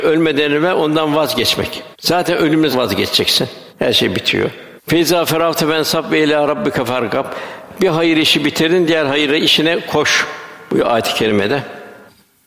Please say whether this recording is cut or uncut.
cut